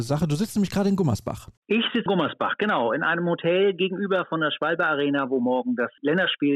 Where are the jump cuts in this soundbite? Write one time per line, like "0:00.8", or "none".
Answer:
0:01.6
0:02.1